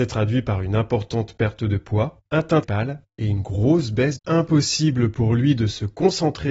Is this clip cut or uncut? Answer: cut